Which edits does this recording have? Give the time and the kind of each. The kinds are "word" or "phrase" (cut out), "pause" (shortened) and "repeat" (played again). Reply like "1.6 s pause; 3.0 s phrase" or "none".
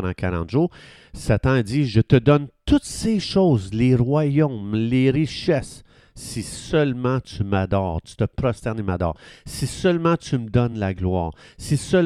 none